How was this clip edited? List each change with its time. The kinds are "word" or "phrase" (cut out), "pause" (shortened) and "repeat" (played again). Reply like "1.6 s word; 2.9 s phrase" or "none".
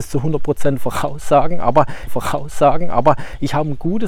2.1 s repeat